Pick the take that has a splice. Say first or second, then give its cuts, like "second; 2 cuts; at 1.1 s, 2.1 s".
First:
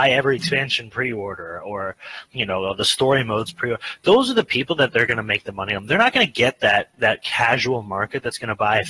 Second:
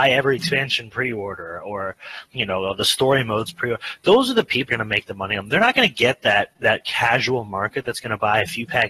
second; 1 cut; at 4.7 s